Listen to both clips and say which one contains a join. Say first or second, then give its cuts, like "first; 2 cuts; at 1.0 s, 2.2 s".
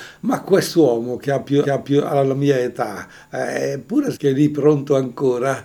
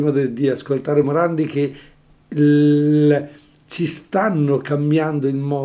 first; 2 cuts; at 1.6 s, 4.1 s